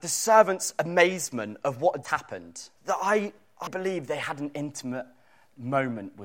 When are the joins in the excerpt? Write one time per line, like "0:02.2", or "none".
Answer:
0:02.0
0:02.8
0:03.7